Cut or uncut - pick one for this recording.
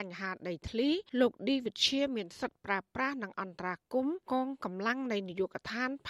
cut